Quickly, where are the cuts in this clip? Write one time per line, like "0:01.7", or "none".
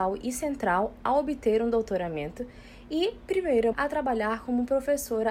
0:03.7